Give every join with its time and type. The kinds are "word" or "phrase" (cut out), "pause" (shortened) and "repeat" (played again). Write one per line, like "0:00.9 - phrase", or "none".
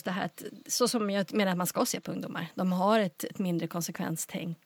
none